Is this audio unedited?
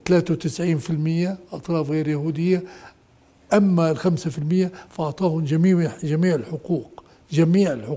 yes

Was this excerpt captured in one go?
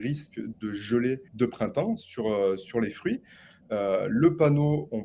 no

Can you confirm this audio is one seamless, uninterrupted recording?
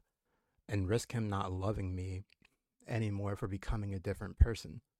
yes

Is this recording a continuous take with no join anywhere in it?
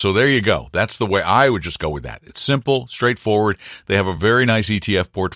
yes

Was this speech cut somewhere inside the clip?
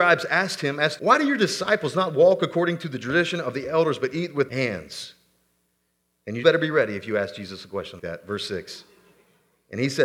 yes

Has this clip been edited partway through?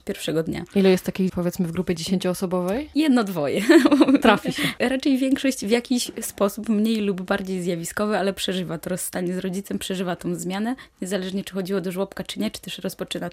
yes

